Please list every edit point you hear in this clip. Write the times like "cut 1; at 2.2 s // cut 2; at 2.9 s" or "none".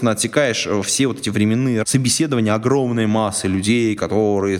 cut 1; at 1.8 s